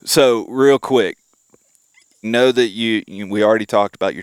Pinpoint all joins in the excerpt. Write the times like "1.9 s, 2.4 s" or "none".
2.2 s